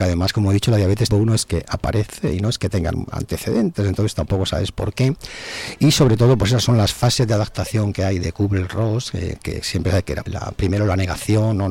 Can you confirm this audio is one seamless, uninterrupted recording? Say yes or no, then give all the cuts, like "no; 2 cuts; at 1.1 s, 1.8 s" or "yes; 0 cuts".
no; 2 cuts; at 1.1 s, 10.3 s